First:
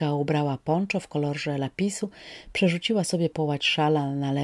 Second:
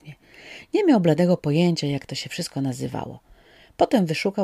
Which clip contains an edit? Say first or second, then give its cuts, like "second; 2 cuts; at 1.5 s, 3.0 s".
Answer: first; 1 cut; at 3.3 s